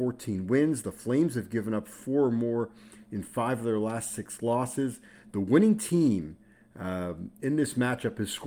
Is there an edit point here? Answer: no; 0 cuts

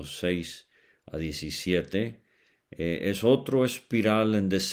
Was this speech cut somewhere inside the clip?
no; 0 cuts

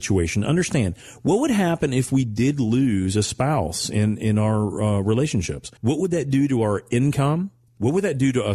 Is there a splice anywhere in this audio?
yes; 1 cut; at 5.8 s

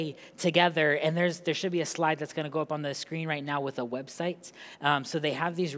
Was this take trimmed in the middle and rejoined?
no; 0 cuts

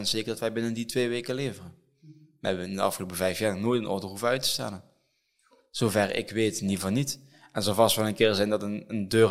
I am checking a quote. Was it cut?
no; 0 cuts

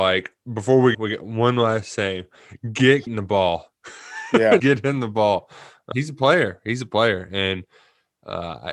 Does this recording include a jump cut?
yes; 4 cuts; at 0.9 s, 3.1 s, 4.6 s, 5.9 s

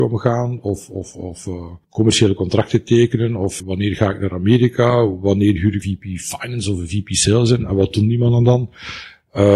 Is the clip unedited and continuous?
no; 3 cuts; at 1.8 s, 3.6 s, 5.8 s

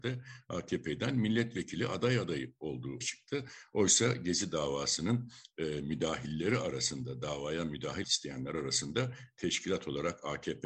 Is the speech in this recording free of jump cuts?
no; 2 cuts; at 3.0 s, 8.0 s

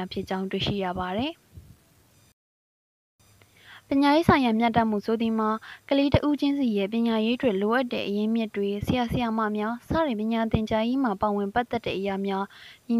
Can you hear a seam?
no; 0 cuts

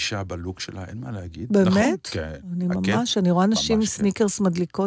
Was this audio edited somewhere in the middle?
no; 0 cuts

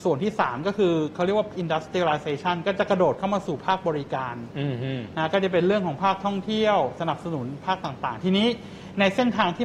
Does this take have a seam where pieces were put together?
yes; 1 cut; at 1.5 s

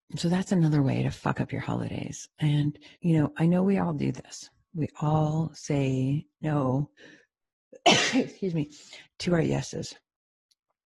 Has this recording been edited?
yes; 2 cuts; at 2.9 s, 7.0 s

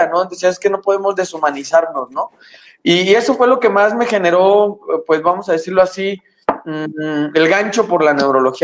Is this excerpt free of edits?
yes; 0 cuts

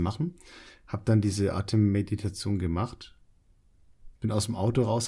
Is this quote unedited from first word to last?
no; 1 cut; at 4.2 s

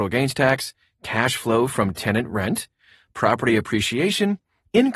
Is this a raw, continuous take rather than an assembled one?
yes; 0 cuts

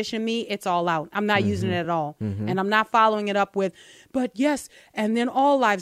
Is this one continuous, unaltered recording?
yes; 0 cuts

